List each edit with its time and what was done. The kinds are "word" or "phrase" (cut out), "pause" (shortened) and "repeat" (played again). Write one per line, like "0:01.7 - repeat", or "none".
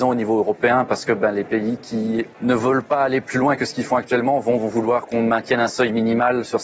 none